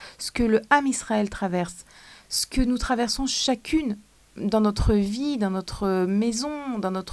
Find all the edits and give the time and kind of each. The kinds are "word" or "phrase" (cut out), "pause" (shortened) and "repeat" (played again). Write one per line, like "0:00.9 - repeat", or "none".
none

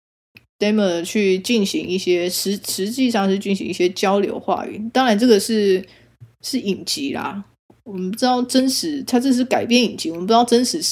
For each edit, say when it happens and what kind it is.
none

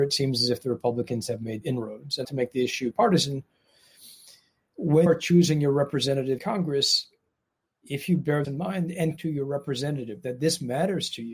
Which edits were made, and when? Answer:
0:01.6 - word
0:02.2 - word
0:02.9 - word
0:05.1 - word
0:06.4 - word
0:08.4 - word
0:09.2 - word

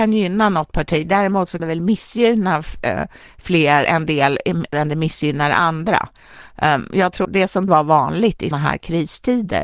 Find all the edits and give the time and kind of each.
0:01.6 - word
0:03.8 - word
0:04.7 - word
0:07.2 - word
0:07.7 - word
0:08.5 - word

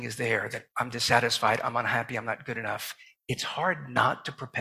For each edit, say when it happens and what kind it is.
none

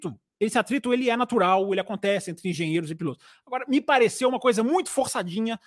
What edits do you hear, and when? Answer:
none

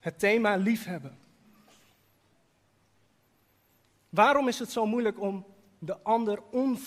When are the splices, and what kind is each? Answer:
none

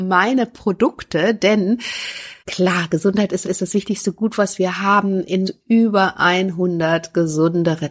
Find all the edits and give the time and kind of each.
0:02.4 - pause
0:03.4 - repeat
0:05.4 - phrase

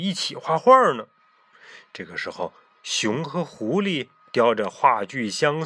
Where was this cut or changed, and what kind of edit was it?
none

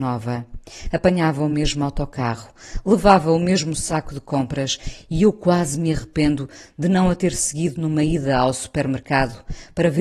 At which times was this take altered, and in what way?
none

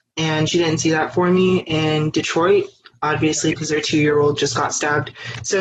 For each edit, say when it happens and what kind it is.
none

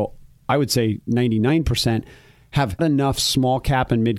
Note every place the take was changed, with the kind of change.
0:02.8 - word

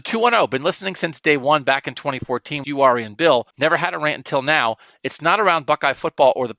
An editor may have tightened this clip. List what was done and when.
0:02.6 - word
0:03.5 - pause

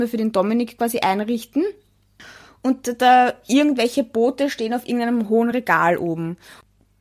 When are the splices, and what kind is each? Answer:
none

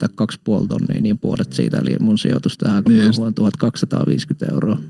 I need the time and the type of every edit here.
0:02.9 - word

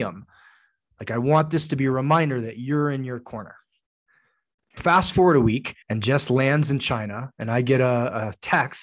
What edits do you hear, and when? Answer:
0:04.8 - word
0:05.8 - pause

